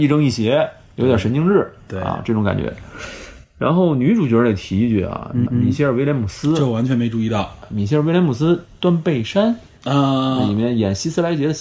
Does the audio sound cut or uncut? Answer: cut